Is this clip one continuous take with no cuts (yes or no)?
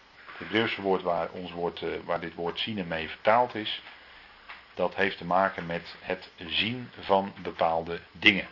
yes